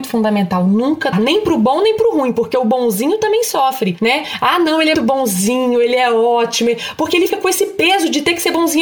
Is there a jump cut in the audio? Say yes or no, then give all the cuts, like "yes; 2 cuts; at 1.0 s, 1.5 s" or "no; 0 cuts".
yes; 3 cuts; at 1.1 s, 4.9 s, 7.3 s